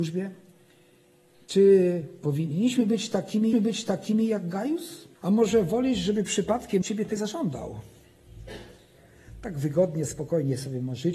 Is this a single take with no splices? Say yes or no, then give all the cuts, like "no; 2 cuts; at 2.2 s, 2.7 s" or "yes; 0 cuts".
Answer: no; 4 cuts; at 3.5 s, 5.1 s, 6.8 s, 7.2 s